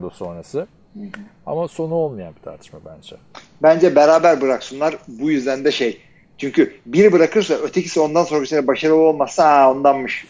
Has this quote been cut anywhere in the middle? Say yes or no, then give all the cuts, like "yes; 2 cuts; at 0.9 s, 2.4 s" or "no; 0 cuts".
no; 0 cuts